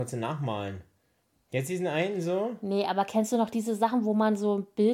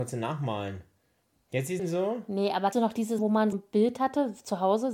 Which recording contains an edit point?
second; 4 cuts; at 1.8 s, 2.7 s, 3.2 s, 3.5 s

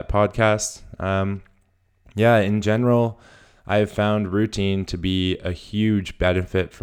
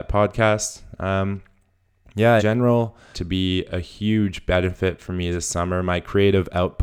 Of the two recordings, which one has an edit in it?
second; 2 cuts; at 2.4 s, 3.1 s

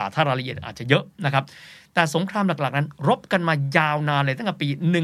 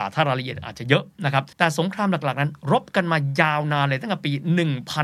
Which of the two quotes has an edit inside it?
second; 1 cut; at 1.5 s

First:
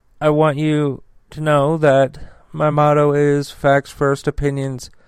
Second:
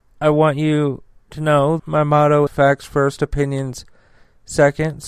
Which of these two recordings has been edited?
second; 2 cuts; at 1.8 s, 2.5 s

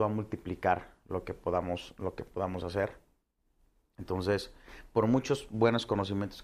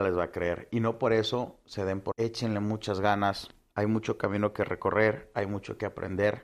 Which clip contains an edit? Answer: second; 1 cut; at 2.1 s

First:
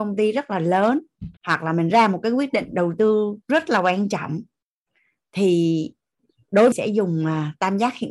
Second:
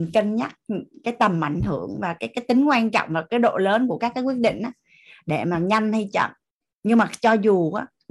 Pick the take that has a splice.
first; 3 cuts; at 1.4 s, 3.4 s, 6.7 s

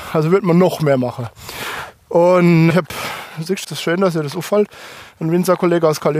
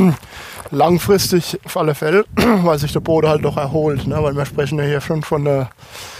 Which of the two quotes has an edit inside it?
first; 2 cuts; at 2.7 s, 3.6 s

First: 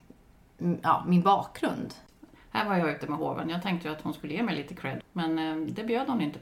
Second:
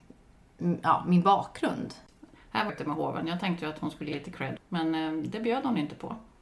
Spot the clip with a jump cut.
second; 2 cuts; at 2.7 s, 4.1 s

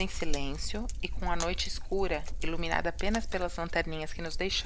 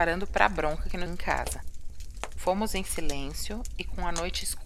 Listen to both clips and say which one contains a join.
second; 1 cut; at 1.1 s

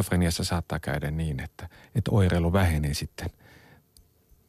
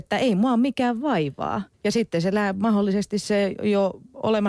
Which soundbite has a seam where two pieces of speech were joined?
second; 1 cut; at 1.7 s

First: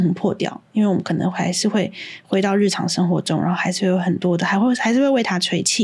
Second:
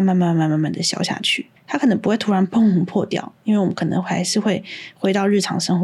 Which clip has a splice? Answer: second; 1 cut; at 1.6 s

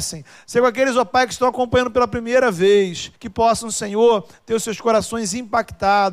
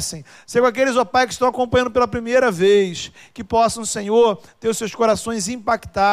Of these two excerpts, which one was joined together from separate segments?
first; 1 cut; at 3.1 s

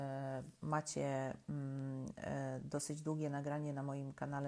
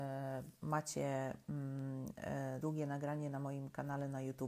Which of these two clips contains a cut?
second; 1 cut; at 2.6 s

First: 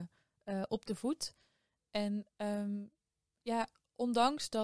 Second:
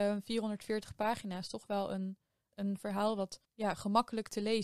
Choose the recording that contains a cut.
second; 2 cuts; at 2.5 s, 3.4 s

